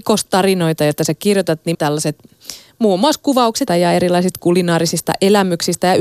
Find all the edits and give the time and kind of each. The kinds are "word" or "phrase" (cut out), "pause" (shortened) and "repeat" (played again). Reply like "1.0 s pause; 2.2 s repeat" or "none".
1.7 s word; 3.7 s phrase